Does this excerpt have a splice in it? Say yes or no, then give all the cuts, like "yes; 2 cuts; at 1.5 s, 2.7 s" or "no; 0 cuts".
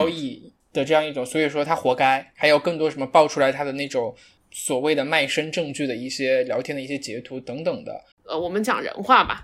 yes; 1 cut; at 8.1 s